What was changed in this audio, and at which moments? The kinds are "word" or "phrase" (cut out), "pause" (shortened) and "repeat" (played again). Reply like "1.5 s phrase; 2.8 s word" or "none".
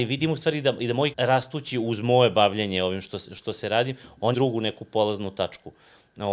1.1 s word; 4.3 s word